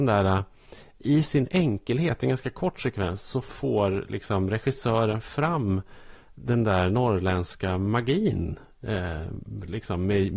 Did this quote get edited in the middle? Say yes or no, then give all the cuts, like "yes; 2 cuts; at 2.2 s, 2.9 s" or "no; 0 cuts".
no; 0 cuts